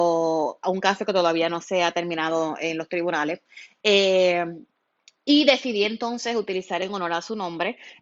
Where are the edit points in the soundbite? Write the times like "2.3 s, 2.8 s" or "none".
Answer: none